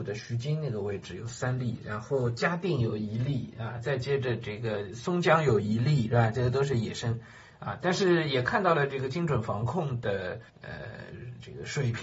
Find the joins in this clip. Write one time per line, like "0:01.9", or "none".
0:10.5